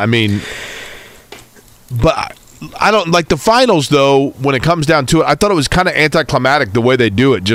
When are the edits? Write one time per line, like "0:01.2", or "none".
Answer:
none